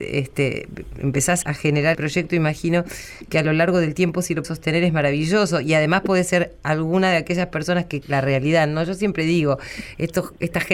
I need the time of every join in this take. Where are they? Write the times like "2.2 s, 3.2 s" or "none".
1.4 s, 1.9 s, 4.4 s, 8.0 s